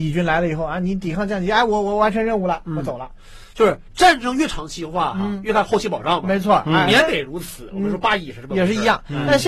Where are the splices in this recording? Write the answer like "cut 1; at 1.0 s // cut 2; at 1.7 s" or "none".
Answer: none